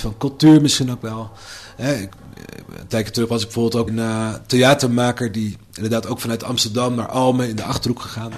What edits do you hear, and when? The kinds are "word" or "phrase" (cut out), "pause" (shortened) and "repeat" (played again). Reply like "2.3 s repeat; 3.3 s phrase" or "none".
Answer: 3.9 s word

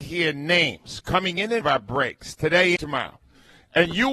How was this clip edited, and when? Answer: 1.6 s word; 2.8 s word

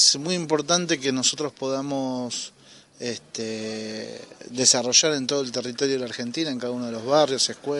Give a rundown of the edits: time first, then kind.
none

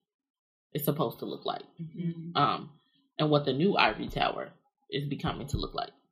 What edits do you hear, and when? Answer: none

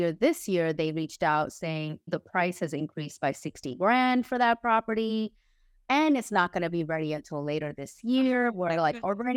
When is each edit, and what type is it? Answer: 2.1 s word

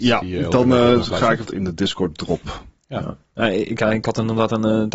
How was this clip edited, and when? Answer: 1.5 s phrase

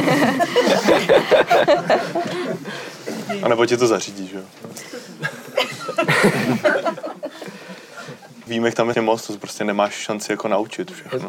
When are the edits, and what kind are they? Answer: 8.5 s phrase; 8.9 s word

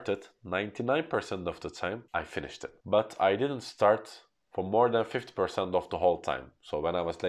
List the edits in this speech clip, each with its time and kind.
none

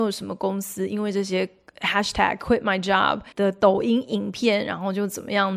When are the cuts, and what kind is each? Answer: 3.3 s pause

